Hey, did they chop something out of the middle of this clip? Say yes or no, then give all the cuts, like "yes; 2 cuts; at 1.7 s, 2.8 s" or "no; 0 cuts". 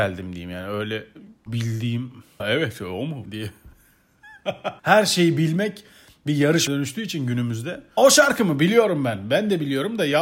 yes; 6 cuts; at 1.5 s, 2.4 s, 3.2 s, 4.8 s, 6.7 s, 8.0 s